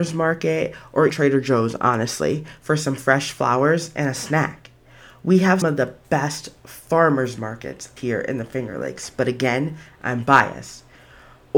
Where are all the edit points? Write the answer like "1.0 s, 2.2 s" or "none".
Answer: 1.1 s, 5.6 s, 8.0 s